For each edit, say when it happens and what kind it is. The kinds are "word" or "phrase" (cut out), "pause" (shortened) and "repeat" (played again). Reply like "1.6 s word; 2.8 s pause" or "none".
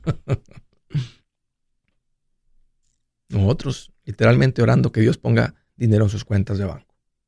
1.2 s pause